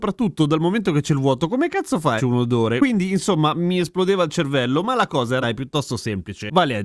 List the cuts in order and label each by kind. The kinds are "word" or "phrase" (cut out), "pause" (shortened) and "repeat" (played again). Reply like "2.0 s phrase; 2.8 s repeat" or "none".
2.2 s word; 5.4 s word